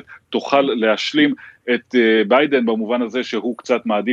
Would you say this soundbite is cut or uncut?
uncut